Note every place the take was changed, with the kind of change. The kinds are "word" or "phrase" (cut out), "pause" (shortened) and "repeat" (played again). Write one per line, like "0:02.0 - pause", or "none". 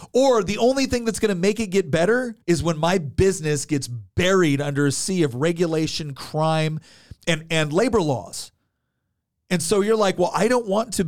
0:02.4 - pause